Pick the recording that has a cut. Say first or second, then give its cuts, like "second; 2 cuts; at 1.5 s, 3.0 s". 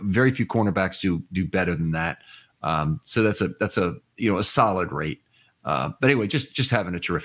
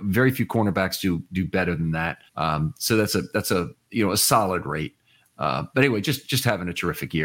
second; 1 cut; at 2.3 s